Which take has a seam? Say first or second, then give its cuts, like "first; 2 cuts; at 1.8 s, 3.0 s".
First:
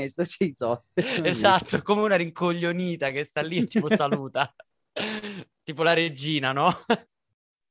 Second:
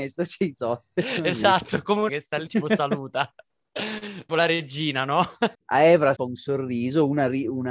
second; 5 cuts; at 2.1 s, 2.5 s, 4.3 s, 5.5 s, 6.2 s